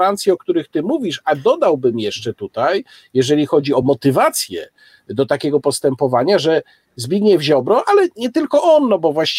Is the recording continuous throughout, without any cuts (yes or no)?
yes